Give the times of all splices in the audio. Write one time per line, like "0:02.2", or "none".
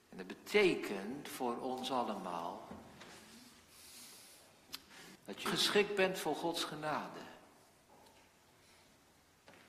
0:05.2
0:05.5